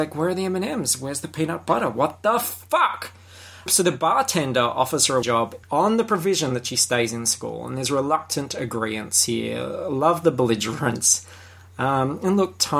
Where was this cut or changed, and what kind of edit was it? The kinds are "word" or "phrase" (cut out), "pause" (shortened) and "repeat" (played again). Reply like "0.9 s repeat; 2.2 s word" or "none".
3.7 s word; 5.2 s word; 5.6 s pause